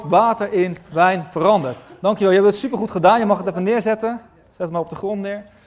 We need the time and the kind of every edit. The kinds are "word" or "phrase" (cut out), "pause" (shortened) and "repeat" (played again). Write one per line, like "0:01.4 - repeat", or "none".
none